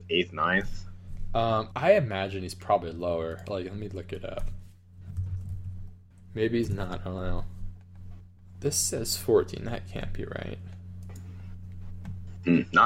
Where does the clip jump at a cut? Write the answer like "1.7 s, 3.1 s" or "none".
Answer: 1.7 s